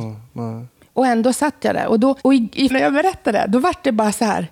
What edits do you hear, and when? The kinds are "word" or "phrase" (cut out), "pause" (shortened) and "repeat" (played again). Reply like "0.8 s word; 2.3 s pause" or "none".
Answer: 2.2 s pause; 2.7 s word